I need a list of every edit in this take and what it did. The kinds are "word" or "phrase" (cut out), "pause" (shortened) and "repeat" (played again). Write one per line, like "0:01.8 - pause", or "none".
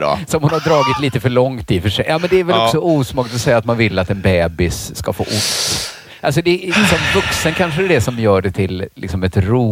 none